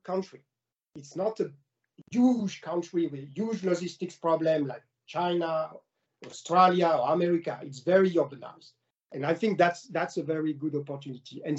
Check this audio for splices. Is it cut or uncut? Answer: uncut